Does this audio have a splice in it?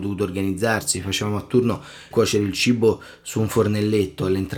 yes; 1 cut; at 2.1 s

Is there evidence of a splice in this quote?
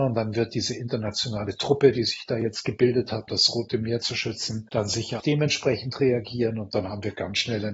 yes; 2 cuts; at 3.3 s, 5.2 s

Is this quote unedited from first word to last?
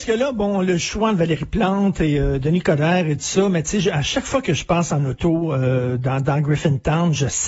yes; 0 cuts

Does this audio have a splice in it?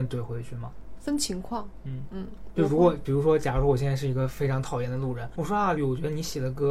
yes; 2 cuts; at 5.3 s, 5.8 s

